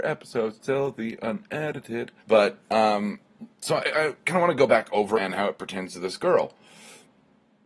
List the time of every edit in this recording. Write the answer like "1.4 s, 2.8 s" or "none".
2.2 s, 5.1 s